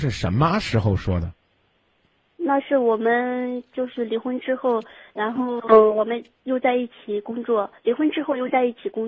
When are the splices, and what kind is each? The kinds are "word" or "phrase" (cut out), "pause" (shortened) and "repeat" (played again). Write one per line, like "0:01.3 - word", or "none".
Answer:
none